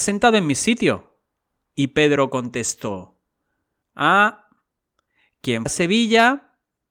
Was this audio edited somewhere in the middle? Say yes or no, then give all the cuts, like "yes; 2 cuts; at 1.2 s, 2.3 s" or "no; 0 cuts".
yes; 1 cut; at 5.7 s